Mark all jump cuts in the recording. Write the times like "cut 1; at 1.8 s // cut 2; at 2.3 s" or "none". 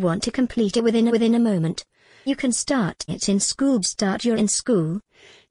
cut 1; at 1.1 s // cut 2; at 2.3 s // cut 3; at 3.1 s // cut 4; at 3.8 s // cut 5; at 4.3 s